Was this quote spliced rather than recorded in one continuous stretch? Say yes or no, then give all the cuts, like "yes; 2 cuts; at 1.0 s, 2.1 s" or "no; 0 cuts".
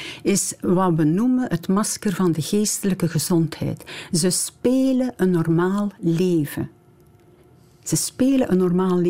no; 0 cuts